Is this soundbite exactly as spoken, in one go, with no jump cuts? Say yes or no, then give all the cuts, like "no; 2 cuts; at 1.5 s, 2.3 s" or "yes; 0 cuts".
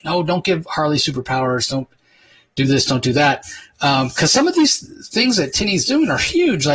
yes; 0 cuts